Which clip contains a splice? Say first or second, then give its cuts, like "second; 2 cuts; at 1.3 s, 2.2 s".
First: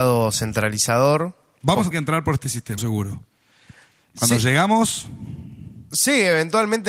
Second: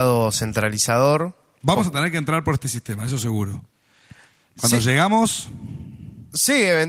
first; 2 cuts; at 1.9 s, 2.8 s